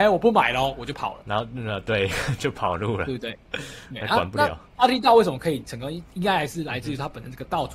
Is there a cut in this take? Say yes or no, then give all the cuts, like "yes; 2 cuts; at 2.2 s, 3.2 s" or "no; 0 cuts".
yes; 1 cut; at 4.7 s